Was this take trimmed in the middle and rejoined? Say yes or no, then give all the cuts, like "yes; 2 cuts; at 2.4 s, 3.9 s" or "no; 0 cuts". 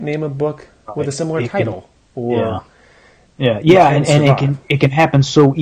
no; 0 cuts